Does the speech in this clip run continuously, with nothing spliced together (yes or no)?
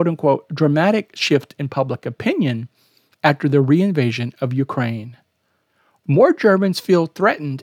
yes